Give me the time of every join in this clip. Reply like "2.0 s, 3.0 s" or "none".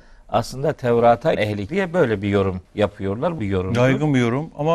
1.3 s, 1.7 s, 2.6 s, 3.4 s